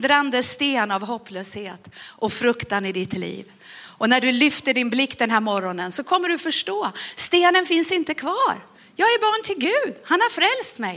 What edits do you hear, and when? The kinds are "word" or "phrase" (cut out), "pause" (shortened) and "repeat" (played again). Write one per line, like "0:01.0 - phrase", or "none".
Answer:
none